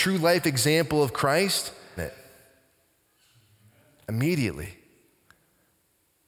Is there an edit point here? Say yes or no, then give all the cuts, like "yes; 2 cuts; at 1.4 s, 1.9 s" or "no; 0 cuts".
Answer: yes; 1 cut; at 2.0 s